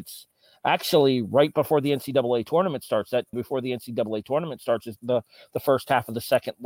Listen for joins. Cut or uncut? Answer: cut